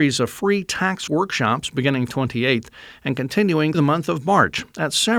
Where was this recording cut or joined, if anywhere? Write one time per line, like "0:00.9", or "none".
0:01.1
0:02.1
0:03.7